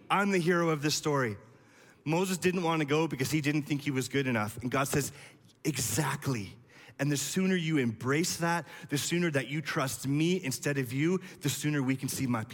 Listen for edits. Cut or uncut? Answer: uncut